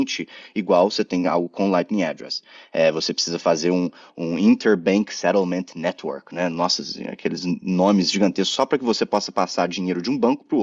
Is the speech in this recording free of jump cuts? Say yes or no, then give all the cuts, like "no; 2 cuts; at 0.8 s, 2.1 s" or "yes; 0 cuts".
yes; 0 cuts